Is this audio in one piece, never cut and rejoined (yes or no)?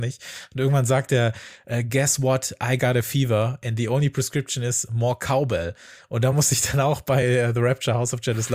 yes